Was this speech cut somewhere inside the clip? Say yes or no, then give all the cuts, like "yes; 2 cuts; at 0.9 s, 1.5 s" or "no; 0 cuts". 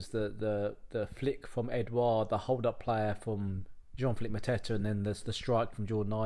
no; 0 cuts